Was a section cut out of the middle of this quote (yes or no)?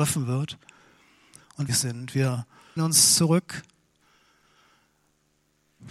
yes